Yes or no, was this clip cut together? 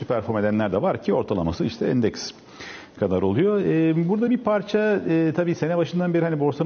no